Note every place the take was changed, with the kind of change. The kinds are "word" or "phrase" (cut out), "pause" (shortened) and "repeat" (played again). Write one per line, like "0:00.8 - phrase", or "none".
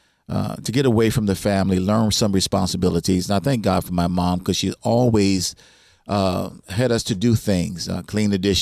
none

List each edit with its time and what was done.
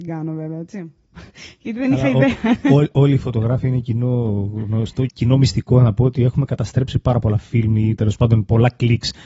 0:05.1 - word

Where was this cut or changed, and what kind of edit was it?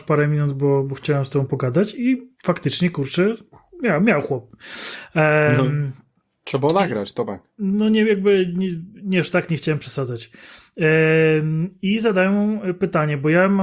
0:02.3 - pause
0:07.5 - pause

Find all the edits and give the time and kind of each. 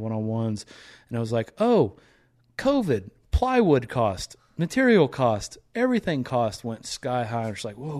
none

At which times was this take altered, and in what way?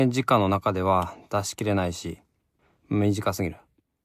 0:02.6 - pause

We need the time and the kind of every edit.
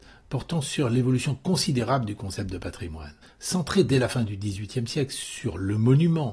0:03.2 - pause

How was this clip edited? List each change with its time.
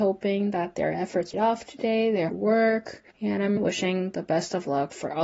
0:01.3 - word
0:02.3 - word
0:03.1 - pause
0:03.6 - word

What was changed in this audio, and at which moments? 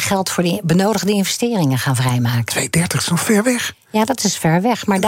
none

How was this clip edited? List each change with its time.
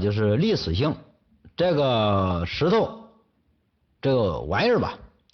none

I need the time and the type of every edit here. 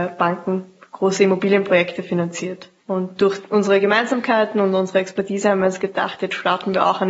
0:02.8 - pause

